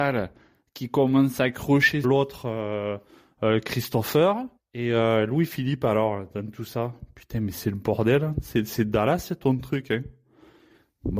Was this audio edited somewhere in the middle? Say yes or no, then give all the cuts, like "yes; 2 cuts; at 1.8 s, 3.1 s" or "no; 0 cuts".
yes; 2 cuts; at 2.0 s, 4.6 s